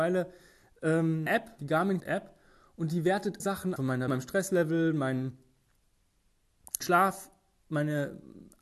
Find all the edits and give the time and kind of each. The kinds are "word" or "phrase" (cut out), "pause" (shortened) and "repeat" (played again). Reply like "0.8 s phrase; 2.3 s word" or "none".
1.3 s word; 1.6 s word; 2.0 s word; 3.4 s word; 3.8 s word; 4.1 s word; 6.8 s word